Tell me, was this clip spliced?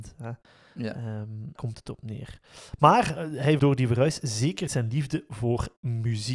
yes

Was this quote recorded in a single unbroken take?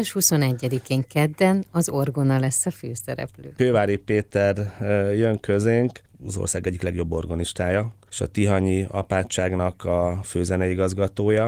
yes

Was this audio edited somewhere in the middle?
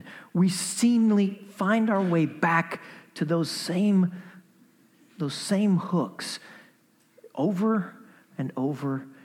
no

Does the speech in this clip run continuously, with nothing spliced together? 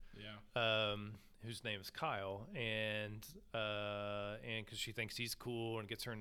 yes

